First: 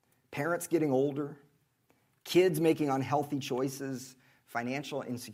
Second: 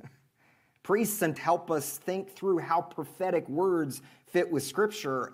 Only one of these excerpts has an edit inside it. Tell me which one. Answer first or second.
second